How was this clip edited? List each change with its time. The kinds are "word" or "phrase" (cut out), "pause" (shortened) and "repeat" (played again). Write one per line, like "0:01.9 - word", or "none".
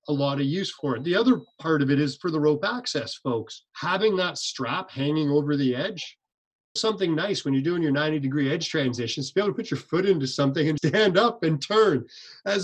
0:03.7 - pause
0:06.8 - word
0:10.8 - word